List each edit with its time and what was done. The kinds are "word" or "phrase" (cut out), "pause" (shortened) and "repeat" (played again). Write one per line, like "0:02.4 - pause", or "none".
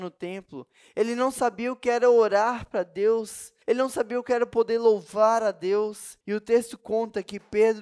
0:03.6 - pause
0:06.2 - pause